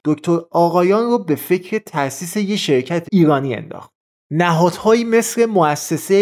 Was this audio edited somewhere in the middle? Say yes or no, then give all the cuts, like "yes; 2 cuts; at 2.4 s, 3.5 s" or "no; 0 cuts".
yes; 1 cut; at 3.1 s